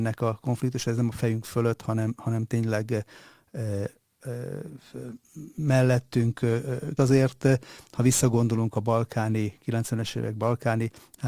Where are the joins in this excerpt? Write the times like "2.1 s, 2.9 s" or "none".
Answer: 7.0 s